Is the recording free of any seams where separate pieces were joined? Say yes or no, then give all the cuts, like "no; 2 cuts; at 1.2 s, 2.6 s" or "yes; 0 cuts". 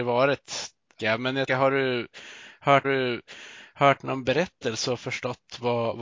no; 3 cuts; at 1.0 s, 1.5 s, 2.8 s